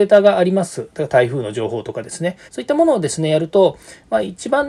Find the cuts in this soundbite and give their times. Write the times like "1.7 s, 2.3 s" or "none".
2.5 s